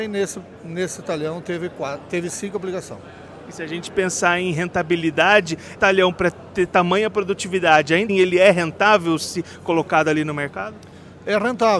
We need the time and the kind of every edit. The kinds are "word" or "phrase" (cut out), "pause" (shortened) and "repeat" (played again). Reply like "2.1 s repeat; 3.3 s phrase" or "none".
5.8 s word; 8.1 s word